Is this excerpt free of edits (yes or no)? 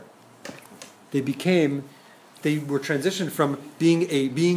yes